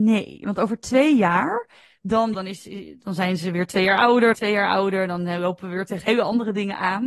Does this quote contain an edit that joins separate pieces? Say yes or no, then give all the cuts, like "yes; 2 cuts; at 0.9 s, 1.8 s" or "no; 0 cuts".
yes; 2 cuts; at 2.3 s, 4.3 s